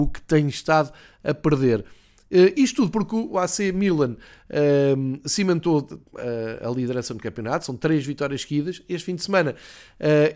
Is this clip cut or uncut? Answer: uncut